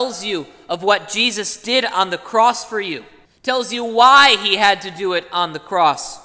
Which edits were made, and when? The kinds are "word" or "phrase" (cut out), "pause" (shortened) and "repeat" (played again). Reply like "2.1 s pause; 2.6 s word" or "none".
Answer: 3.3 s pause